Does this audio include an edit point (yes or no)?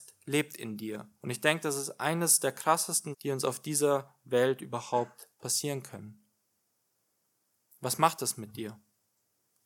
yes